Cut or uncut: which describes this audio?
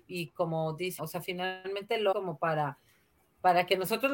cut